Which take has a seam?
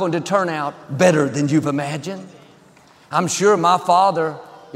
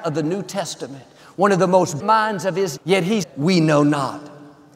second; 3 cuts; at 2.0 s, 2.8 s, 3.2 s

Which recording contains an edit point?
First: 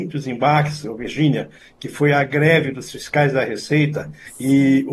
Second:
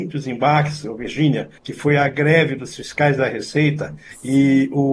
second; 1 cut; at 1.6 s

